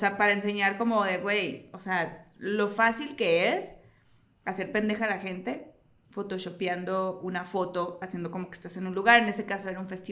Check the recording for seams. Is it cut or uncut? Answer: uncut